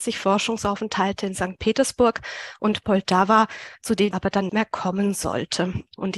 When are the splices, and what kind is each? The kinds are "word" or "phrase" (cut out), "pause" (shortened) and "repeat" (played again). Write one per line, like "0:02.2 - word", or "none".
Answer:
0:04.1 - word
0:04.5 - word